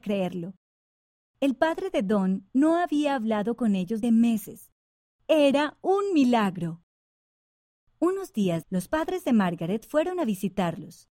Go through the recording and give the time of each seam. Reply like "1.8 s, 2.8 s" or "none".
4.0 s, 8.6 s